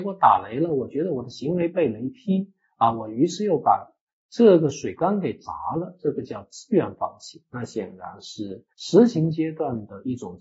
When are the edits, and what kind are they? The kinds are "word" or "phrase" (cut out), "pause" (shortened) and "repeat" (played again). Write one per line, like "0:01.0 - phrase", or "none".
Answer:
0:08.7 - pause